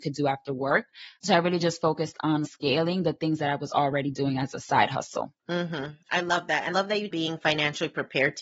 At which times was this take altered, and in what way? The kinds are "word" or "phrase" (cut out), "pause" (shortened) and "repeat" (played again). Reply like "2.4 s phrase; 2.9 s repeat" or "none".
2.4 s phrase; 5.4 s pause; 6.7 s word; 7.1 s phrase